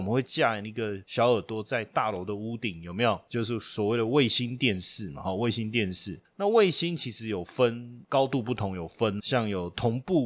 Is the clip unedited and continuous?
no; 1 cut; at 9.2 s

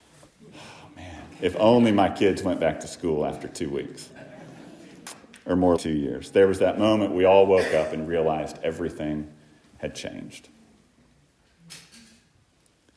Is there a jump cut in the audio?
yes; 1 cut; at 5.8 s

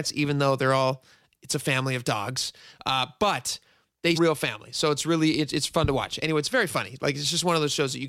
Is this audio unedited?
no; 1 cut; at 4.2 s

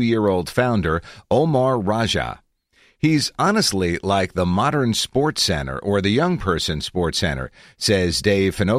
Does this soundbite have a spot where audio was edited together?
no; 0 cuts

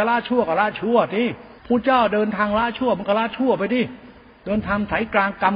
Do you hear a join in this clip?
yes; 1 cut; at 1.6 s

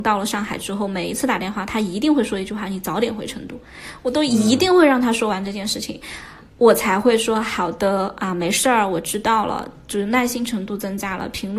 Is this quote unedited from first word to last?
no; 1 cut; at 6.5 s

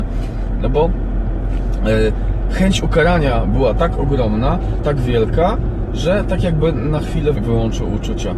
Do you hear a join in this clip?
yes; 1 cut; at 7.3 s

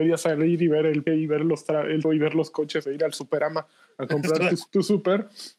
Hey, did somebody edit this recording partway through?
yes; 3 cuts; at 1.1 s, 2.0 s, 4.7 s

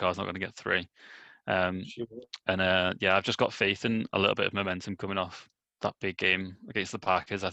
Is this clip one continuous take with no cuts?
yes; 0 cuts

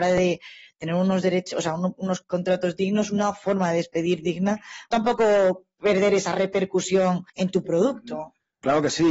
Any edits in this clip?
yes; 4 cuts; at 2.2 s, 4.9 s, 7.3 s, 7.6 s

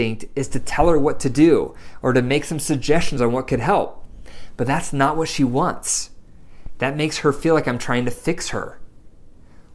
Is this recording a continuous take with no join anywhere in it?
yes; 0 cuts

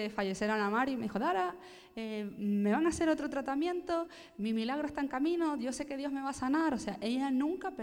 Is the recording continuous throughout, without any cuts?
yes; 0 cuts

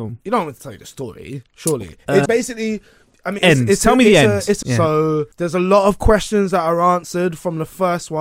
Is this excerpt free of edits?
no; 4 cuts; at 2.3 s, 3.4 s, 4.6 s, 5.3 s

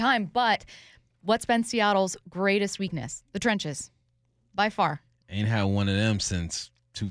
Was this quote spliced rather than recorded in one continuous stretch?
no; 0 cuts

